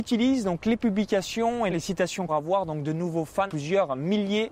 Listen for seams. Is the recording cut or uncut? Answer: cut